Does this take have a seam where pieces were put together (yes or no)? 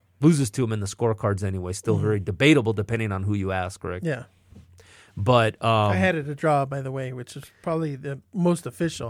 no